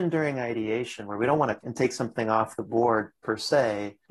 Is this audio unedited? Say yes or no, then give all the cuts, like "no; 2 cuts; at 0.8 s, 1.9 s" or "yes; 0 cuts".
no; 1 cut; at 1.6 s